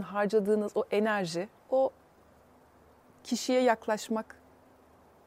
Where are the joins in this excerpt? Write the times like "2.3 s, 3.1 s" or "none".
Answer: 1.6 s